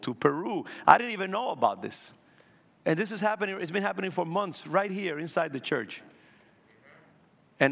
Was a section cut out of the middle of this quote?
no; 0 cuts

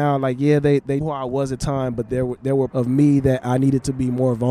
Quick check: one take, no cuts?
no; 3 cuts; at 1.0 s, 1.6 s, 2.7 s

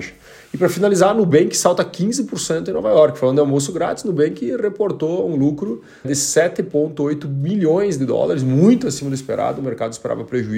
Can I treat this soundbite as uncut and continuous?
no; 1 cut; at 6.0 s

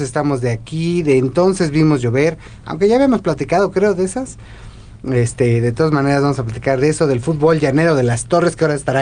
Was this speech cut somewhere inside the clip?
no; 0 cuts

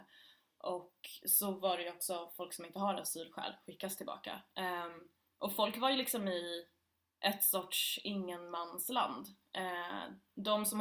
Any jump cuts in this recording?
no; 0 cuts

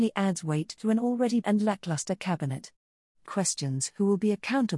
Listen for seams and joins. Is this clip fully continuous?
no; 2 cuts; at 1.4 s, 3.2 s

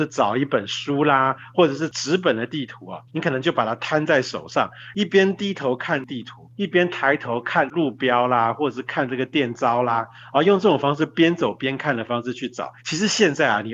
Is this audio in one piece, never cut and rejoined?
no; 3 cuts; at 3.1 s, 6.5 s, 12.8 s

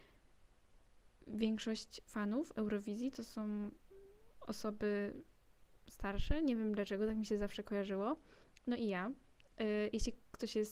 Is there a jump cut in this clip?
no; 0 cuts

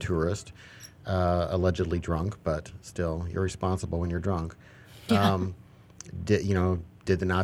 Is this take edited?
no; 0 cuts

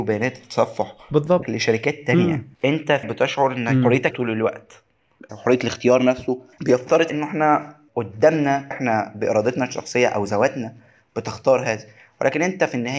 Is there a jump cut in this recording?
yes; 8 cuts; at 1.4 s, 2.5 s, 3.0 s, 4.1 s, 5.3 s, 6.5 s, 7.1 s, 8.7 s

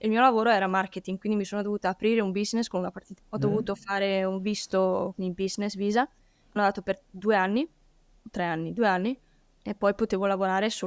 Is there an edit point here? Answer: yes; 4 cuts; at 3.2 s, 5.1 s, 6.6 s, 9.5 s

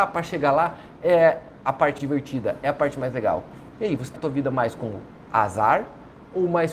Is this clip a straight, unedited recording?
no; 2 cuts; at 2.0 s, 4.2 s

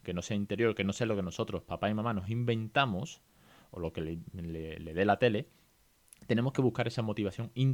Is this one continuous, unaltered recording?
yes; 0 cuts

